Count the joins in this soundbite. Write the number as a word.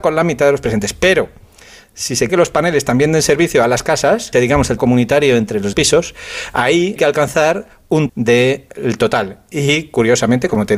six